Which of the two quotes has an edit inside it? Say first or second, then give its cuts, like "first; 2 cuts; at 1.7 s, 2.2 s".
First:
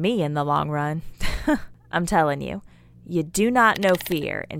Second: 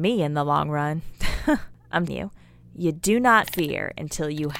second; 2 cuts; at 2.1 s, 3.4 s